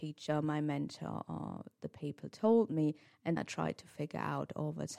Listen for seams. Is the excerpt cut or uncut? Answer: cut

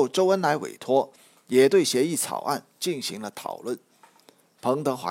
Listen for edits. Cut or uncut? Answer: uncut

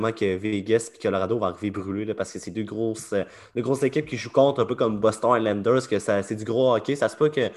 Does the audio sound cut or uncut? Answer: uncut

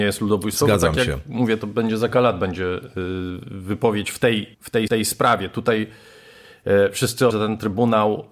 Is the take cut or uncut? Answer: cut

